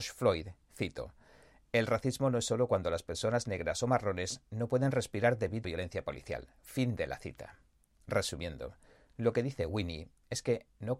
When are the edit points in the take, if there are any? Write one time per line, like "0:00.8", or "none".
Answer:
0:05.6